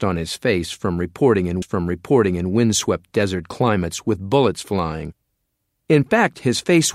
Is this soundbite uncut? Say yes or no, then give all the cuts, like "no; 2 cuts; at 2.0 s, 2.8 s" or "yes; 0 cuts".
no; 1 cut; at 1.6 s